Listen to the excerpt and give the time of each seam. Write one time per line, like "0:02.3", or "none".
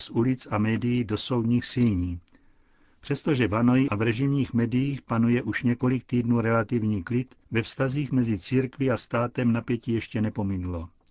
0:07.4